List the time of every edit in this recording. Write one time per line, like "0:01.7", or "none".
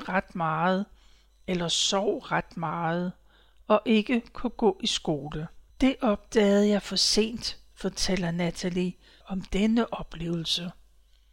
0:05.7